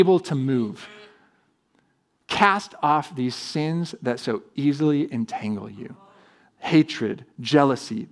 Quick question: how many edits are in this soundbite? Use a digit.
0